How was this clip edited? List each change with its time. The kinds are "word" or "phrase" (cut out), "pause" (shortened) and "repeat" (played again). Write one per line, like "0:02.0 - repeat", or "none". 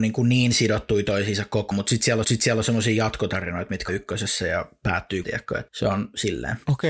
0:01.7 - word
0:02.2 - repeat
0:03.9 - word
0:05.2 - word
0:05.7 - word

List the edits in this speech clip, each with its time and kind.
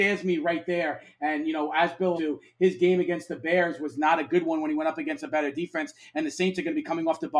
0:02.2 - word

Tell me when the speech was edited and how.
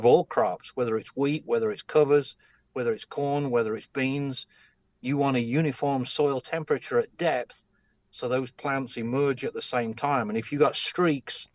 none

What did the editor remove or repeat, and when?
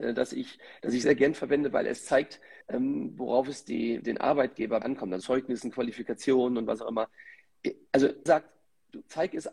0:01.0 - word
0:02.6 - pause
0:04.0 - word
0:04.8 - word
0:05.2 - word
0:08.3 - word

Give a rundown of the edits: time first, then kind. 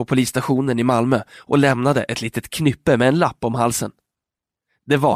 none

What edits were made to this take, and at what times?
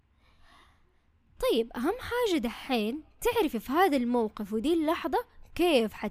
none

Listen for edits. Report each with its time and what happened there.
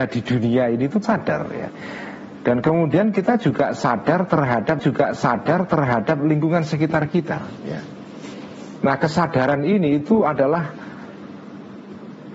0:01.0 - word
0:04.8 - repeat

